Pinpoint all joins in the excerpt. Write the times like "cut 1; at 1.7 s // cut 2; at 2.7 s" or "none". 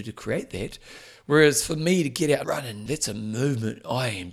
cut 1; at 2.4 s // cut 2; at 2.9 s